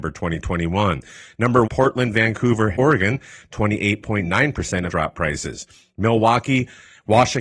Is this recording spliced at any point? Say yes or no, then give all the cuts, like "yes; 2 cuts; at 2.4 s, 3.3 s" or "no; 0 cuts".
yes; 3 cuts; at 1.6 s, 2.7 s, 4.9 s